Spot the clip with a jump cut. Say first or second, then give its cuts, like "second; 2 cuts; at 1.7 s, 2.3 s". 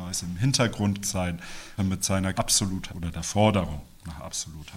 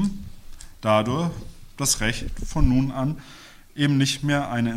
first; 4 cuts; at 1.0 s, 1.8 s, 2.4 s, 2.9 s